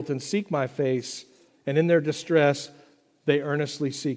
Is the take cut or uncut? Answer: uncut